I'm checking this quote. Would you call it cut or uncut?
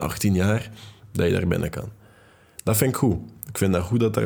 uncut